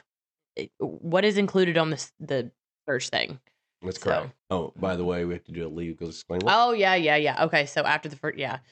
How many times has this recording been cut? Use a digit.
1